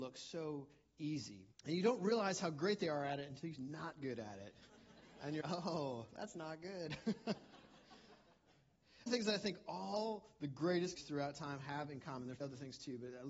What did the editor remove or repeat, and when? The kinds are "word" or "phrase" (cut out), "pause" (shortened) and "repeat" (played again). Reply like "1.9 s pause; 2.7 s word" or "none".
1.5 s pause; 3.6 s phrase; 5.4 s word; 9.1 s phrase; 11.0 s word; 12.4 s word